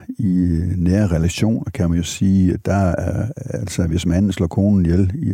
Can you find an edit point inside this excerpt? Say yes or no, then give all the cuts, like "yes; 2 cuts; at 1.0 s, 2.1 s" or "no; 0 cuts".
no; 0 cuts